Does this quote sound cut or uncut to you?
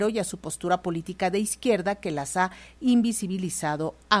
uncut